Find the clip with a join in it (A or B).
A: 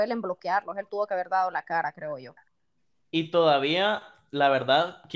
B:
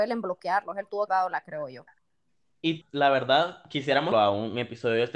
B